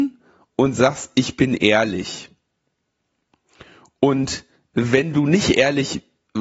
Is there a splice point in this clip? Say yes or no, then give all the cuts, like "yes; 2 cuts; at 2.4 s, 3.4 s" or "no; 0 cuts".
no; 0 cuts